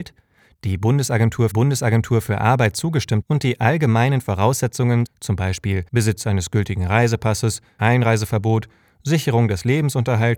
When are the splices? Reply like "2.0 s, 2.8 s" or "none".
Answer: 1.5 s, 3.2 s, 5.1 s, 5.9 s, 7.8 s

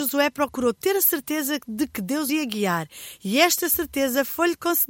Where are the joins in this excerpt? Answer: 2.3 s

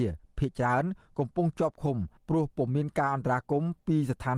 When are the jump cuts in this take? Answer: 2.2 s

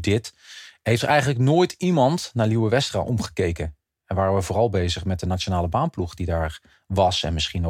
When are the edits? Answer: none

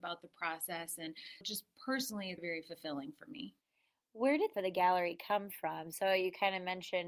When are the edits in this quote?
1.4 s, 2.4 s, 4.5 s

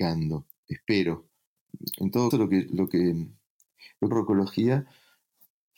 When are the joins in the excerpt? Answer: 2.3 s, 4.1 s

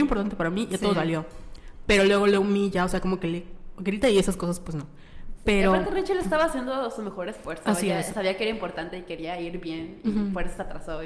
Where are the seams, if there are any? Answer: 0.9 s

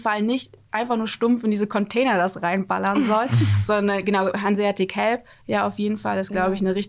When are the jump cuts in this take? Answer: none

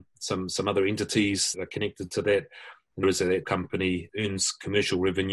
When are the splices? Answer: 1.5 s, 3.0 s, 3.4 s, 4.1 s

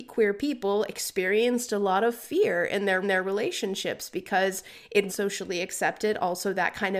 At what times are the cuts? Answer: 3.0 s, 5.1 s

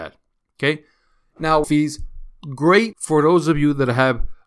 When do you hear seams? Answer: 1.6 s, 2.9 s

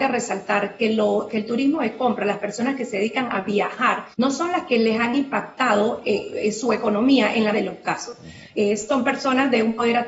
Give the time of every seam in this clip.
4.1 s, 7.5 s

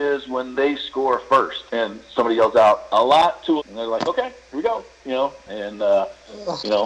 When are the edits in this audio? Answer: 1.7 s, 3.6 s

